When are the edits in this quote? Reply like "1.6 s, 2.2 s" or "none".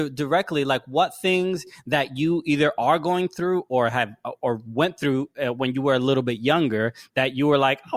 none